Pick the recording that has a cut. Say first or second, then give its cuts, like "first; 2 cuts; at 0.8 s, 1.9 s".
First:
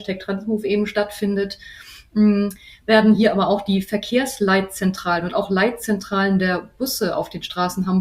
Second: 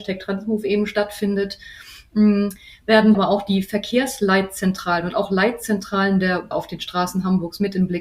second; 2 cuts; at 3.1 s, 6.5 s